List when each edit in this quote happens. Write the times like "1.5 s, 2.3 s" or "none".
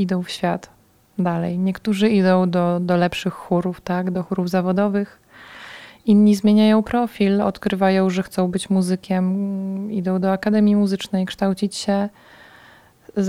none